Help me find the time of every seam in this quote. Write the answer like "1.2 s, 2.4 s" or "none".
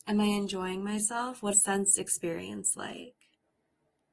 1.5 s